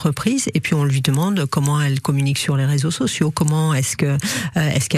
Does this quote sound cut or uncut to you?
uncut